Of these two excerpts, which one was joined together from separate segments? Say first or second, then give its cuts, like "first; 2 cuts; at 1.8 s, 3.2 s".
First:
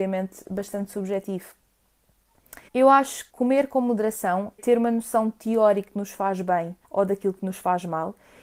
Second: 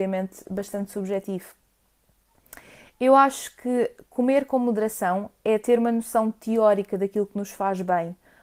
first; 5 cuts; at 2.7 s, 3.3 s, 4.6 s, 5.9 s, 6.8 s